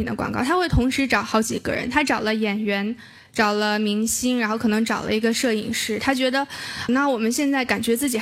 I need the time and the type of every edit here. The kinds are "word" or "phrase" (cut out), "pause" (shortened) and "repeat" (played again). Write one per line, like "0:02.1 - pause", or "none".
0:06.9 - word